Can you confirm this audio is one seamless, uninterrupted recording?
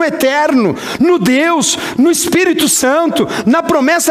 yes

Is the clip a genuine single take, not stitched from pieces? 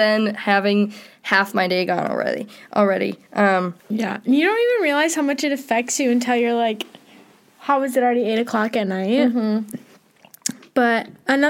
no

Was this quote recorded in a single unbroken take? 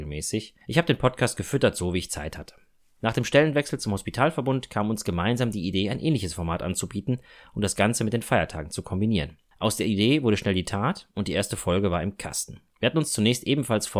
yes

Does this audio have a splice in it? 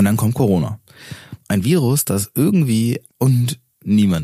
yes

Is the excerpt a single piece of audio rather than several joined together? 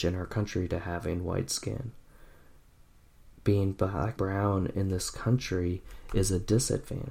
no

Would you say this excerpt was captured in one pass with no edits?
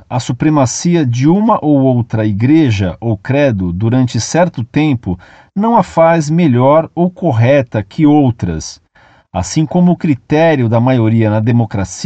yes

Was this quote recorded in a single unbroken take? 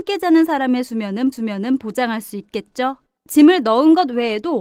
no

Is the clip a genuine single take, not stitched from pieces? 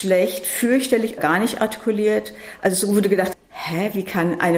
no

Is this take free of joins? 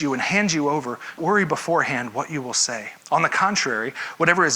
no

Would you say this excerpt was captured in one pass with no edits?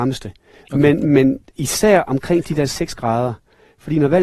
yes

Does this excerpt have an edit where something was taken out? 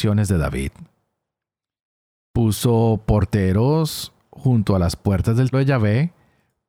yes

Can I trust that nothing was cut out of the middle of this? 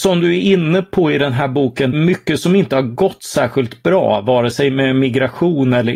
no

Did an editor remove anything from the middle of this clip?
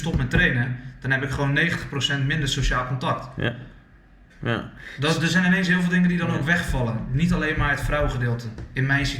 no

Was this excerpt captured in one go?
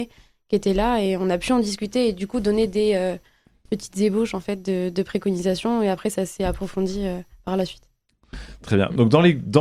yes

